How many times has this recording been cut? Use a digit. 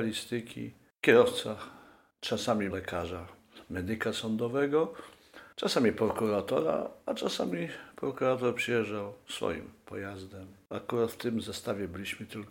2